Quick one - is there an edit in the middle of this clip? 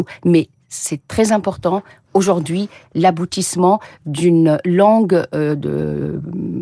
yes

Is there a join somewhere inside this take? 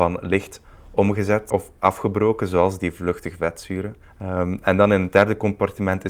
yes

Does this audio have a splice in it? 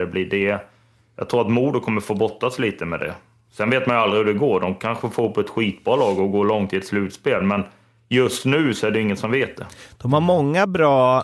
no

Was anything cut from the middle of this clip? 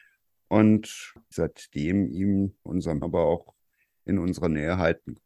yes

